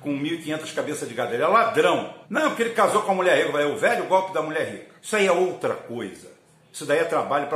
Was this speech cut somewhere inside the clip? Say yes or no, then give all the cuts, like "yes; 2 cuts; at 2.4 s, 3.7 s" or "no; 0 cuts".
yes; 2 cuts; at 2.2 s, 5.0 s